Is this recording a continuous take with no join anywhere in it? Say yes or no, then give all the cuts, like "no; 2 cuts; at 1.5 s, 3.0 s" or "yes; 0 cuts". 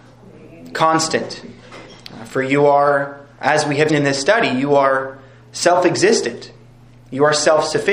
no; 2 cuts; at 3.3 s, 3.9 s